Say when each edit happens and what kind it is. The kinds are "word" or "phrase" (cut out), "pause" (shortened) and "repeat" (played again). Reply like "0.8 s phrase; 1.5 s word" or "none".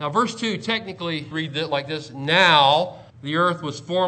1.3 s word; 3.1 s pause